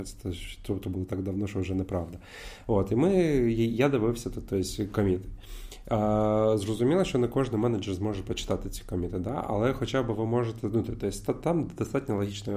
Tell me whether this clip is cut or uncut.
uncut